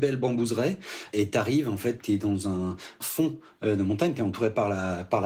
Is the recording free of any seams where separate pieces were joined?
yes; 0 cuts

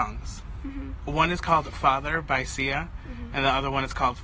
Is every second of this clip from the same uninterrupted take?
no; 1 cut; at 1.7 s

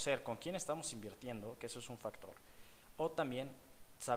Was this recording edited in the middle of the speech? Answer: no; 0 cuts

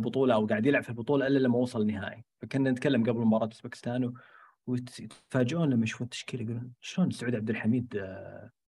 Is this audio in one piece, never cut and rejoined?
yes; 0 cuts

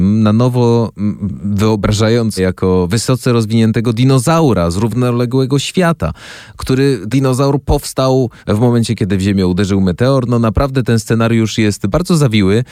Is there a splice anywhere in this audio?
yes; 3 cuts; at 2.4 s, 7.1 s, 8.4 s

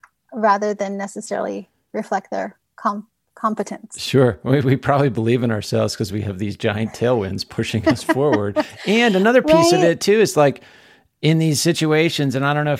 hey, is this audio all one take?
yes; 0 cuts

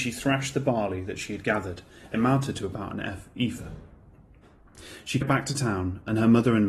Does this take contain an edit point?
yes; 2 cuts; at 2.1 s, 5.2 s

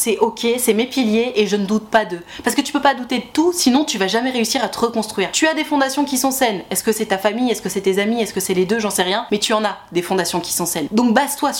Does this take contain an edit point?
no; 0 cuts

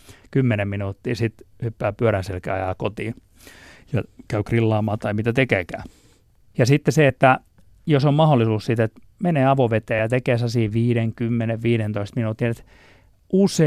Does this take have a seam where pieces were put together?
no; 0 cuts

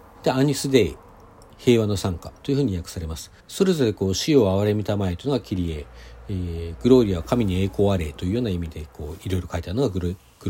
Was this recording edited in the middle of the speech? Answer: yes; 1 cut; at 3.4 s

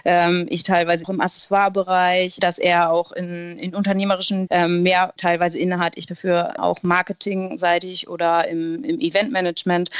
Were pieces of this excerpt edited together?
yes; 5 cuts; at 1.0 s, 2.4 s, 4.5 s, 5.2 s, 6.6 s

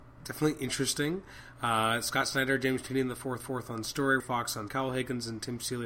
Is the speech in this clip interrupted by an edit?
yes; 3 cuts; at 3.4 s, 4.2 s, 4.7 s

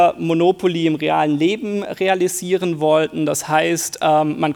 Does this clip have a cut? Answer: no; 0 cuts

